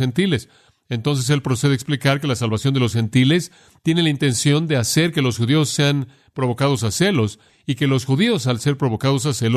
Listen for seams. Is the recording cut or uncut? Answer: uncut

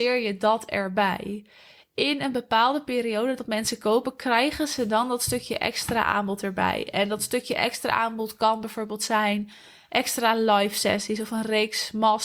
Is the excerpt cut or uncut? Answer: uncut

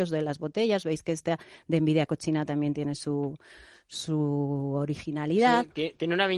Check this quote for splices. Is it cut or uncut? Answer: uncut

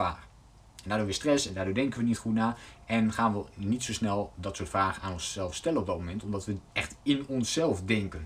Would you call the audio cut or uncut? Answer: cut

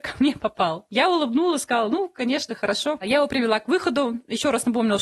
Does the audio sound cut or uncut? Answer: uncut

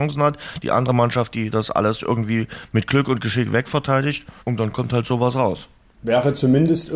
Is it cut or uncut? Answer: cut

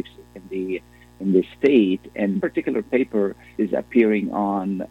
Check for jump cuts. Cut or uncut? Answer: cut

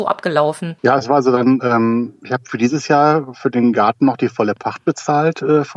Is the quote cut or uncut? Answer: uncut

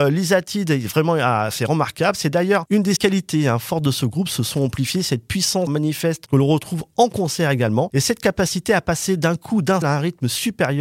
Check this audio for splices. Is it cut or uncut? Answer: cut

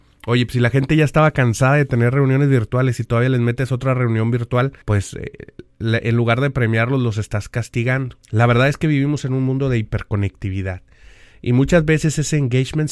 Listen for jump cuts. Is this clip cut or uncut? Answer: cut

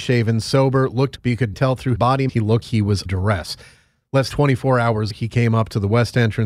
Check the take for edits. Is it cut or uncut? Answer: cut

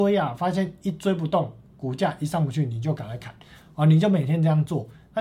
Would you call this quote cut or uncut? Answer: uncut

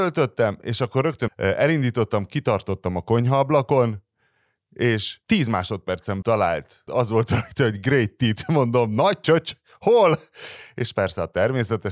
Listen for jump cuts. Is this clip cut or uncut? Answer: cut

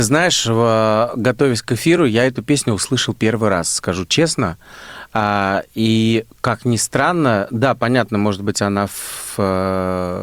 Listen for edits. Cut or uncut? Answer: uncut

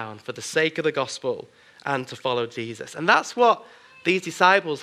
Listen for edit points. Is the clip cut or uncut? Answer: uncut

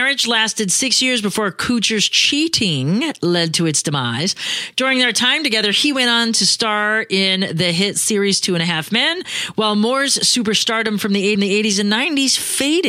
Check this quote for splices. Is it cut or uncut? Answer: cut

